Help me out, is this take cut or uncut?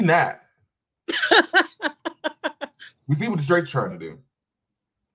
uncut